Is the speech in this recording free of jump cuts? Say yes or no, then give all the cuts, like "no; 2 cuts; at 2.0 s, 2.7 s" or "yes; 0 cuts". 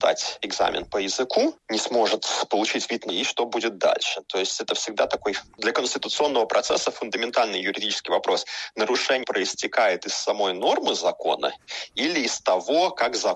no; 3 cuts; at 3.1 s, 5.5 s, 9.2 s